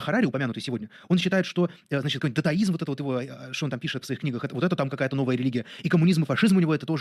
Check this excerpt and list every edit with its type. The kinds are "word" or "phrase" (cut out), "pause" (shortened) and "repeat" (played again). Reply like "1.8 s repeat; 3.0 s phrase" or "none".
4.0 s word